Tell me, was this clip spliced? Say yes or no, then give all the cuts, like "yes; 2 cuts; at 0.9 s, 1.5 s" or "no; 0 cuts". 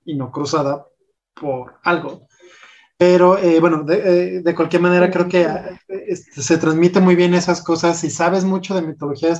no; 0 cuts